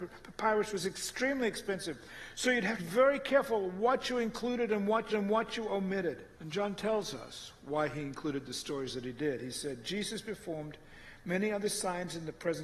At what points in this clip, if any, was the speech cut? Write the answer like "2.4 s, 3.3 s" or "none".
2.8 s, 5.1 s, 6.3 s

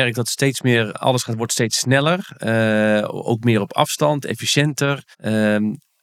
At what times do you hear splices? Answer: 0.9 s, 5.1 s

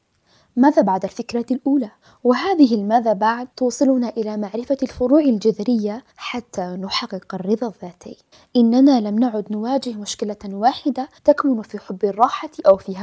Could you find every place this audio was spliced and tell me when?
2.0 s, 3.5 s, 6.1 s, 8.3 s, 11.2 s

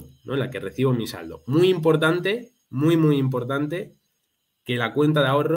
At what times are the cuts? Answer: 2.6 s

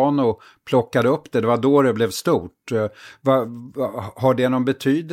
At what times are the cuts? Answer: none

